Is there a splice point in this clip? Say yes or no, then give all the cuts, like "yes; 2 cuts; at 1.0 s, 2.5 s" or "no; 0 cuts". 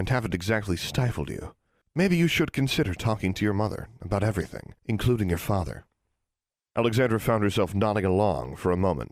yes; 2 cuts; at 1.8 s, 4.8 s